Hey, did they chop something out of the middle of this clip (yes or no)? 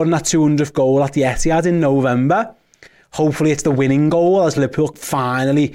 no